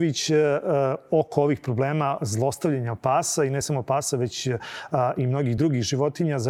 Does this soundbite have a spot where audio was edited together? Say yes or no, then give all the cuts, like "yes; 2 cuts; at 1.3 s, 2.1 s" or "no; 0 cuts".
no; 0 cuts